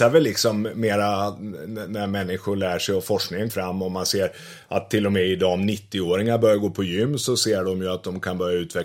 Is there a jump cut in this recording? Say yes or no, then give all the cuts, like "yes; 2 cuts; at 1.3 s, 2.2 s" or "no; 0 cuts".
yes; 1 cut; at 3.5 s